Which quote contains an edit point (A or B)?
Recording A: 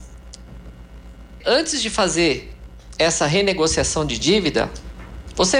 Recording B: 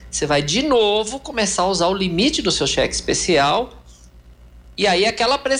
A